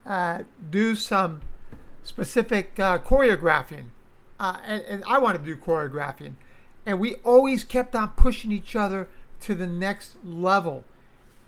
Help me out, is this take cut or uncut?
cut